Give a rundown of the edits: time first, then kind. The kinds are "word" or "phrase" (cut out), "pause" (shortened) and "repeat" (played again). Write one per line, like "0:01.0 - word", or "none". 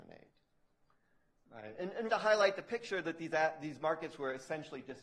0:02.1 - word